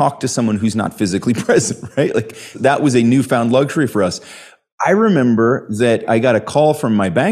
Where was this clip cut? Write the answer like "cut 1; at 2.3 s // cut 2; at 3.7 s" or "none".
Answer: none